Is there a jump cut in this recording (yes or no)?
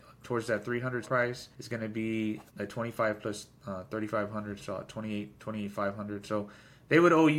yes